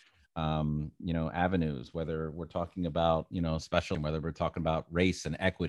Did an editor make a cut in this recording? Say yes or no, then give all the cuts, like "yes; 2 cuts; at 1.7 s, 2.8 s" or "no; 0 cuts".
yes; 1 cut; at 3.9 s